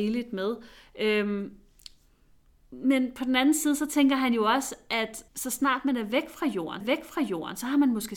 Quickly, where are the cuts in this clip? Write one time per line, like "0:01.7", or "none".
0:05.3
0:06.8

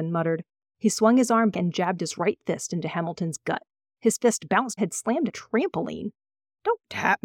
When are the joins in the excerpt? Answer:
0:01.5
0:04.8
0:05.3

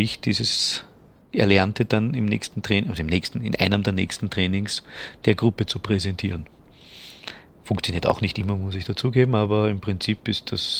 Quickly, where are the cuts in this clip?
none

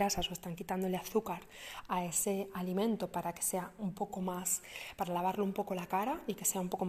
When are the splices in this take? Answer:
none

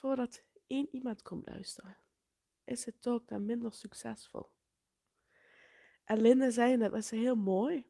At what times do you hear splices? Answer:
none

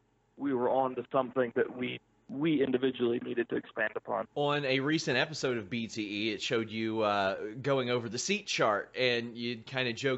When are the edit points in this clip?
0:04.3

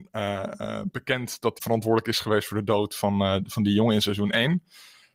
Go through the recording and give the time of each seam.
0:01.6

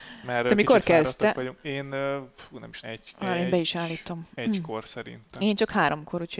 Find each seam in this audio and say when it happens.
0:02.8

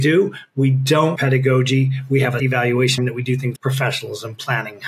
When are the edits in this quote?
0:01.2
0:02.4
0:03.0
0:03.6

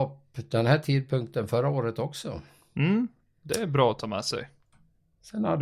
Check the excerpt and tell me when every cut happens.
none

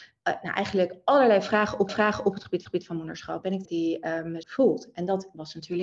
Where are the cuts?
0:01.9
0:02.6
0:03.6
0:04.4

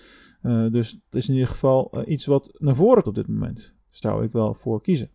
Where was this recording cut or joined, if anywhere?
0:01.1
0:02.6
0:03.0
0:04.0

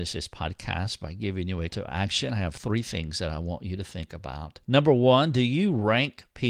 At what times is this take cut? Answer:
0:01.7
0:04.6

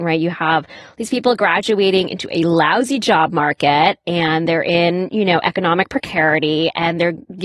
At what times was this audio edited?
none

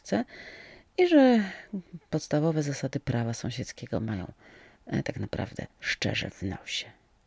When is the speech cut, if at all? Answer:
0:05.7

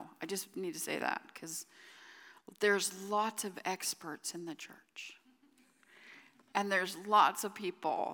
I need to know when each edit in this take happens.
none

